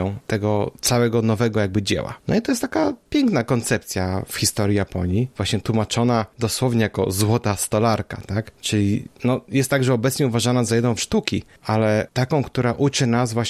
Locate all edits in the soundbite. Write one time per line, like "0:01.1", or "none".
0:11.0